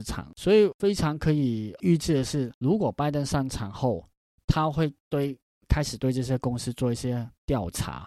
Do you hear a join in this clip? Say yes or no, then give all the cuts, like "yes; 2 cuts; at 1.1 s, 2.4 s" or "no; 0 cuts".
no; 0 cuts